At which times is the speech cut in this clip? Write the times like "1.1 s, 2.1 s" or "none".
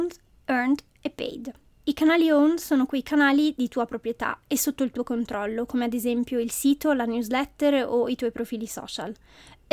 none